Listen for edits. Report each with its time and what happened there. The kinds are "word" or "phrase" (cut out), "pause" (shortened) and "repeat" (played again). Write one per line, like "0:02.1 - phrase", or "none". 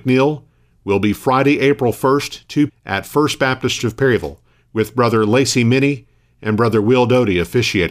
0:02.7 - word
0:03.8 - word